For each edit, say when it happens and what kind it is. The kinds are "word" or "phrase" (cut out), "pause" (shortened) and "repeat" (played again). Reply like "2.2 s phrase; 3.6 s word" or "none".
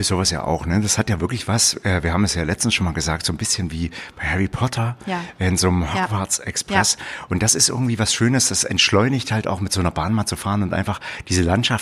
none